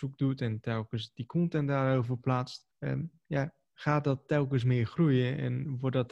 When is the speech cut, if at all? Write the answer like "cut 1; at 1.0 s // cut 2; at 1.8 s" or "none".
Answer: cut 1; at 2.7 s